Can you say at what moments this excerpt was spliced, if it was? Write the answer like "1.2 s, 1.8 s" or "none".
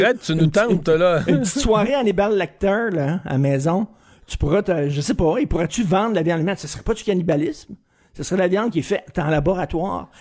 none